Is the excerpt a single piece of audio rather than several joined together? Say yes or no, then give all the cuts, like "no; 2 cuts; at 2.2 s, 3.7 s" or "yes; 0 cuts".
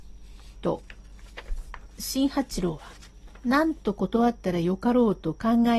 yes; 0 cuts